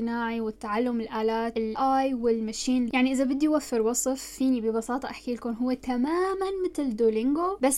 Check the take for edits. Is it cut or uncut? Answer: cut